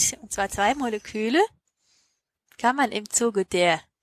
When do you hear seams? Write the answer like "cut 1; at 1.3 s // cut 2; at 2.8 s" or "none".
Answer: none